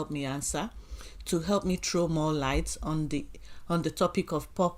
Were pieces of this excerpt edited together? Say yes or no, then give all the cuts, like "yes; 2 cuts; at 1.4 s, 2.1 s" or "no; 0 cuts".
no; 0 cuts